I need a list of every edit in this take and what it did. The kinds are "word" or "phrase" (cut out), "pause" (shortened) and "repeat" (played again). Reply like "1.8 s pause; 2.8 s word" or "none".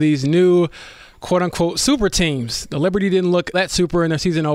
3.5 s word